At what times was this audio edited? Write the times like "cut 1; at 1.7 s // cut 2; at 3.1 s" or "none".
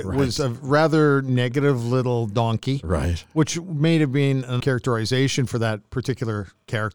cut 1; at 4.6 s